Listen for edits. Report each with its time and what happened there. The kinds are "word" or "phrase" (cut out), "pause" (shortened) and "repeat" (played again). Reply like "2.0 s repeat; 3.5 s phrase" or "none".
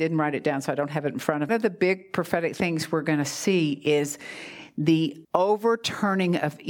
1.5 s phrase; 5.2 s pause